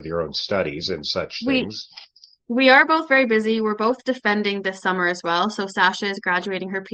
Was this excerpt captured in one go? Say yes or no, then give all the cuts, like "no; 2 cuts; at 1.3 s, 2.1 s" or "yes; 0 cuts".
yes; 0 cuts